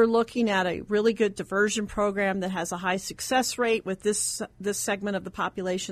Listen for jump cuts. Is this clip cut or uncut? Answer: uncut